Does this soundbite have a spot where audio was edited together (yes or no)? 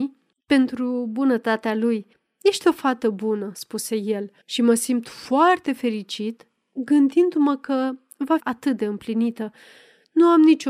yes